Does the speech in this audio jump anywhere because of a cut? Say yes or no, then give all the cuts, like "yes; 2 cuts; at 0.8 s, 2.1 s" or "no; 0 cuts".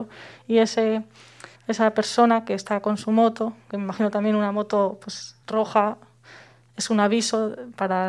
yes; 3 cuts; at 1.5 s, 3.6 s, 5.4 s